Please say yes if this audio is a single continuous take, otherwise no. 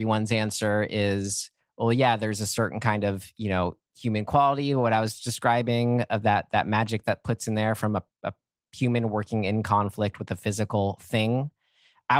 yes